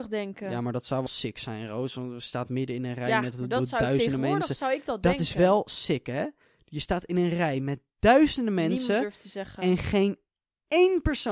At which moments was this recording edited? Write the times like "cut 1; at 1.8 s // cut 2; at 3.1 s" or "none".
cut 1; at 1.1 s